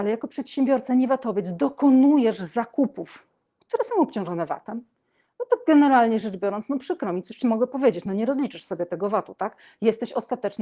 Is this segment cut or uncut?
uncut